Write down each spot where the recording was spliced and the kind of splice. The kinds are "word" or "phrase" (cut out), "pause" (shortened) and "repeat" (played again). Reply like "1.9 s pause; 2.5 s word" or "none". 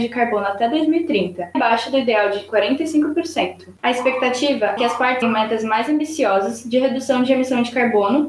1.5 s word; 4.8 s word; 5.2 s word